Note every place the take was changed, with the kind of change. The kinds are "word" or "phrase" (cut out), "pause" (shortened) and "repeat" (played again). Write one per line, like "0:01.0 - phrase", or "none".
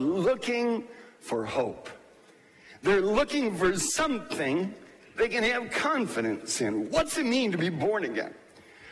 none